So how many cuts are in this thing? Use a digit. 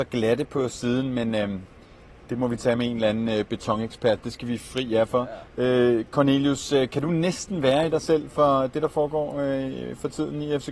0